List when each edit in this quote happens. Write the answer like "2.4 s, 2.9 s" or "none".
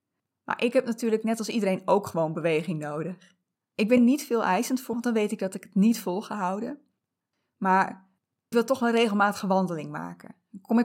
3.5 s, 4.0 s, 4.9 s, 8.5 s